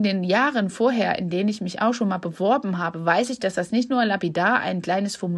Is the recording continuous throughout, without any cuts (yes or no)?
yes